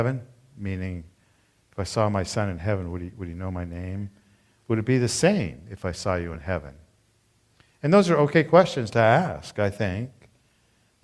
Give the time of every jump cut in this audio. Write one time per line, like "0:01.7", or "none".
none